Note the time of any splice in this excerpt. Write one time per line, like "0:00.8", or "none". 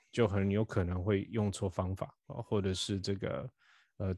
0:02.2